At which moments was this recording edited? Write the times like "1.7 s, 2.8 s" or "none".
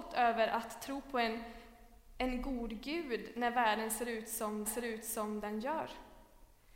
4.6 s